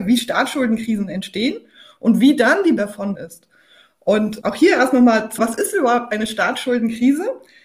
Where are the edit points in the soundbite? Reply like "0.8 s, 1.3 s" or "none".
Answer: 2.8 s, 3.1 s, 4.4 s, 5.4 s